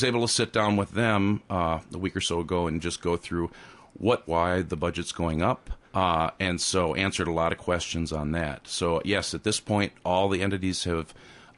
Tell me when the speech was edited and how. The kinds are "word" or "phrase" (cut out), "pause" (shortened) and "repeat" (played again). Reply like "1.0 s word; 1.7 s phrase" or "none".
4.3 s phrase; 5.9 s pause

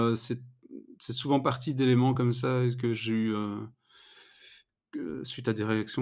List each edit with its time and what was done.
none

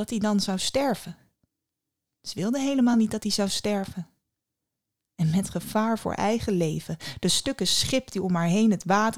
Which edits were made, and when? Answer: none

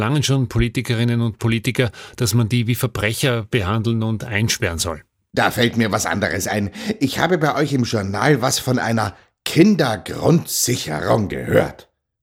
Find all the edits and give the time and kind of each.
none

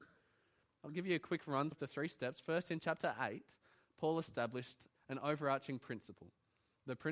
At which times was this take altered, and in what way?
1.7 s word

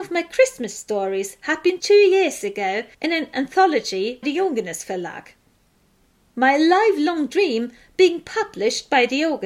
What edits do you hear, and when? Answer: 1.8 s word; 2.9 s pause; 4.2 s word

